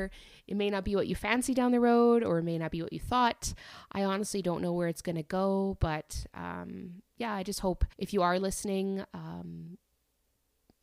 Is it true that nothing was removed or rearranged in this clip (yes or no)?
no